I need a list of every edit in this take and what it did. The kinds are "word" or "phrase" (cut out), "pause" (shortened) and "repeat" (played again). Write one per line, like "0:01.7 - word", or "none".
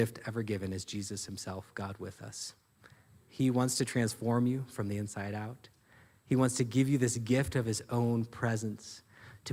none